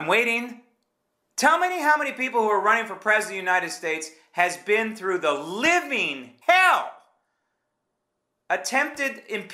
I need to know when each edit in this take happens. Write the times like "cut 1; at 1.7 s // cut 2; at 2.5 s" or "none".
cut 1; at 1.1 s // cut 2; at 6.4 s